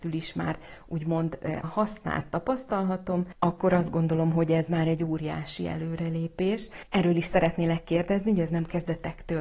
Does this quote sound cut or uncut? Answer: cut